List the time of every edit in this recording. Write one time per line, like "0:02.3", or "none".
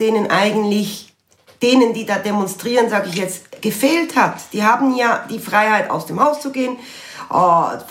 none